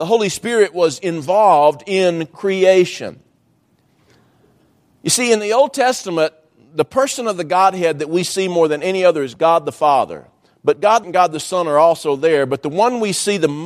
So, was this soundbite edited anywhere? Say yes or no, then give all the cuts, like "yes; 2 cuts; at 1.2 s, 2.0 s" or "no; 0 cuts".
yes; 1 cut; at 11.0 s